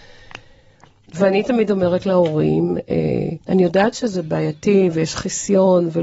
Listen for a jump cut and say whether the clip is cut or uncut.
cut